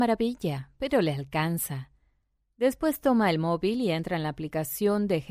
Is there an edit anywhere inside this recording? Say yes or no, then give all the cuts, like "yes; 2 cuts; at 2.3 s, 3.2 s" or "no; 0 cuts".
no; 0 cuts